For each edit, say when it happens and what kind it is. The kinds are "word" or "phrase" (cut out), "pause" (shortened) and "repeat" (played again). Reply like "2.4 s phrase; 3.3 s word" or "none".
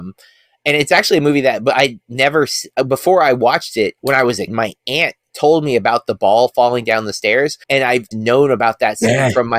4.0 s pause; 4.5 s word; 7.6 s pause; 8.1 s word